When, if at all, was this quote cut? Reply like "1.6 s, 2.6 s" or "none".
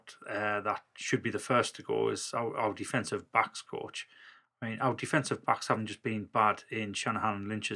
none

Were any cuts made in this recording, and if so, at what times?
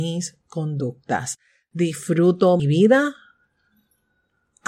2.6 s

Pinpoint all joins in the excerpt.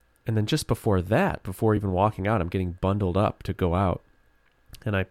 none

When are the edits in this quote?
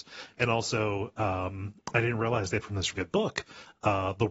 2.6 s, 2.9 s

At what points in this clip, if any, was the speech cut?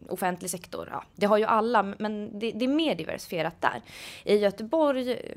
none

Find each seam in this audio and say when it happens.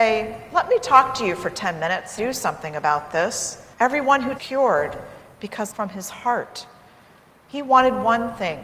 2.2 s, 3.7 s, 4.4 s, 5.7 s

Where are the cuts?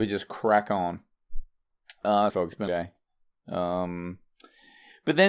2.3 s, 2.7 s

